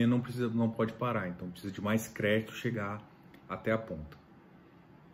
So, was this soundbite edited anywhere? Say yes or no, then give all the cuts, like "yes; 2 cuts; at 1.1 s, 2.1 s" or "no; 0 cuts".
no; 0 cuts